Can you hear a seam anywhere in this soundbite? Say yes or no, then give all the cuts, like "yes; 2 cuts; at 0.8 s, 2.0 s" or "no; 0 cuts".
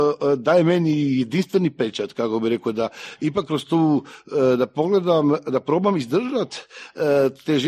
no; 0 cuts